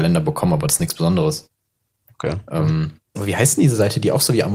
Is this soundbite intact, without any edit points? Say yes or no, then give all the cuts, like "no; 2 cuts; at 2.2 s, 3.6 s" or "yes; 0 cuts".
no; 1 cut; at 3.2 s